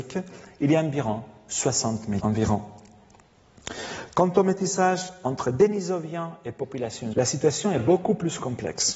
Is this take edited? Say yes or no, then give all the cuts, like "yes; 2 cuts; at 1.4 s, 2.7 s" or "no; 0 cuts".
yes; 2 cuts; at 2.2 s, 7.1 s